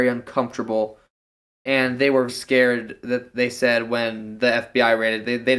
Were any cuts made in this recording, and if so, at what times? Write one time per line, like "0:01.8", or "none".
0:02.3